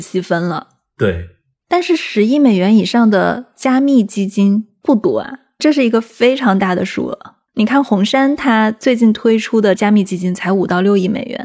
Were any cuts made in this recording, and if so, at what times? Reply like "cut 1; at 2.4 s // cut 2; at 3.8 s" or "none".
none